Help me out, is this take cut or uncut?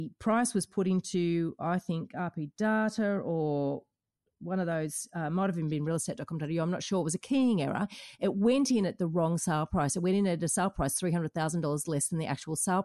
uncut